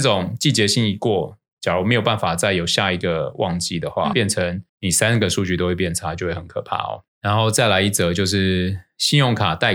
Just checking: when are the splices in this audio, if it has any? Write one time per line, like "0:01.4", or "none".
0:04.1
0:04.7
0:07.1